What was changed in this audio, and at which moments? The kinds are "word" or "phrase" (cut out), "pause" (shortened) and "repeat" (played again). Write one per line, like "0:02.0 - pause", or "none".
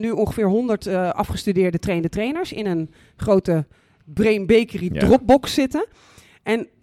none